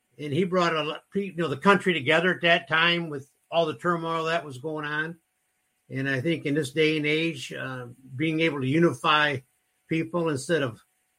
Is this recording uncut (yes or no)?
yes